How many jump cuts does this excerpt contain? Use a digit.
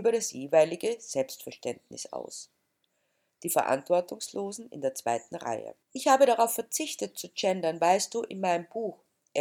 1